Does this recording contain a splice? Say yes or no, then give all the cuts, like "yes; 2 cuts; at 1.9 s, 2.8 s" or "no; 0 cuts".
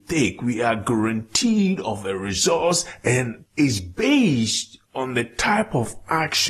yes; 1 cut; at 4.8 s